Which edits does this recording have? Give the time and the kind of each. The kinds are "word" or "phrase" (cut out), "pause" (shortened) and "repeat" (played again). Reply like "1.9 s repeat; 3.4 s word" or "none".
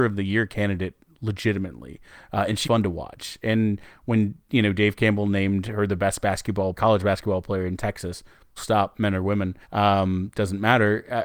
2.6 s word; 6.7 s word; 8.6 s word; 9.6 s pause